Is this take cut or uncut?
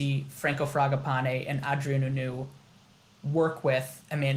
uncut